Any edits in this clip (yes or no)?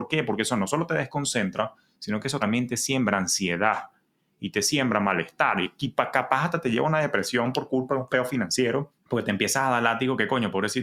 yes